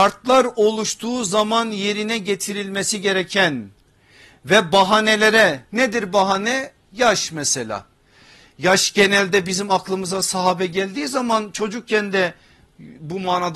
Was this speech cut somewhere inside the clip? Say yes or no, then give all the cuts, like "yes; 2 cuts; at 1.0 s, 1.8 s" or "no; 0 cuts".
no; 0 cuts